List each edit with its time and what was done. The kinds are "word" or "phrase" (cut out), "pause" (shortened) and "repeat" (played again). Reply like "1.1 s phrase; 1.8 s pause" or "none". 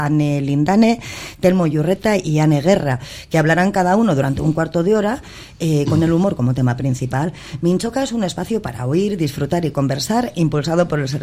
none